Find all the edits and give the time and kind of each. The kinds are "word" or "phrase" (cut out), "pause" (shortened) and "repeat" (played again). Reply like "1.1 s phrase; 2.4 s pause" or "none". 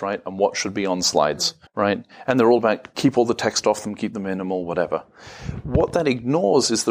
1.7 s pause